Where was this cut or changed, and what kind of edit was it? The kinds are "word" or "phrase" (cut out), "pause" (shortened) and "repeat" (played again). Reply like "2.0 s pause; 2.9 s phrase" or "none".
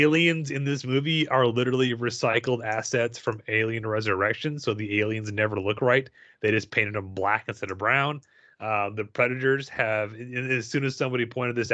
none